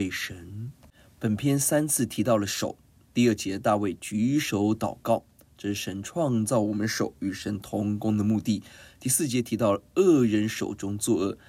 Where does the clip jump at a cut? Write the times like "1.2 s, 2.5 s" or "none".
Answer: none